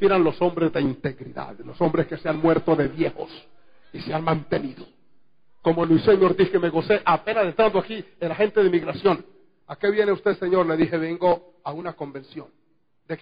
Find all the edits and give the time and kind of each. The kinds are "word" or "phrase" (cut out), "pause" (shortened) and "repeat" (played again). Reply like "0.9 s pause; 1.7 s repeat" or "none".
none